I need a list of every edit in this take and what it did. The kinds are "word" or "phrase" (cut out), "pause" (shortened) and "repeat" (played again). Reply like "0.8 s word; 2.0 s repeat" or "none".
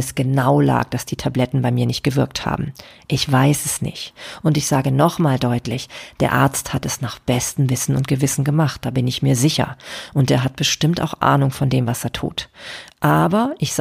none